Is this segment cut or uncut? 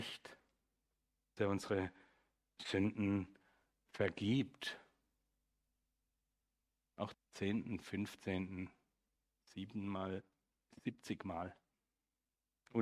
cut